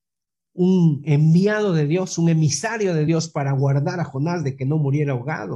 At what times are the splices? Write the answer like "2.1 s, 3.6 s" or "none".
none

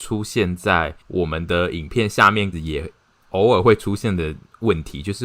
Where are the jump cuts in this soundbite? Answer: 1.0 s, 2.5 s

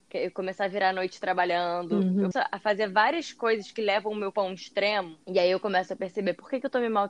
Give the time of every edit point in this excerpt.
2.3 s, 4.3 s, 5.2 s

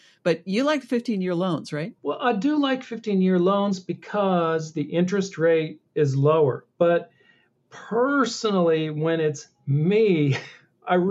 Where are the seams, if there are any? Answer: 2.0 s, 5.9 s, 6.7 s

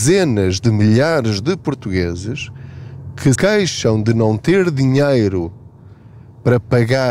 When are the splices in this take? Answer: 3.4 s

